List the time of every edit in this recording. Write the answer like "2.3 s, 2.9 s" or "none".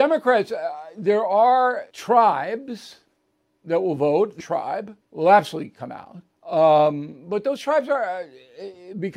1.9 s, 4.4 s, 5.0 s, 6.3 s